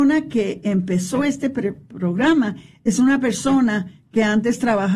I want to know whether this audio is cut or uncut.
uncut